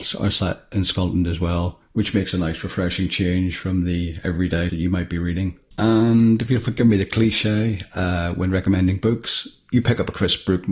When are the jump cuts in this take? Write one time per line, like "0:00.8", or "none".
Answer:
0:04.7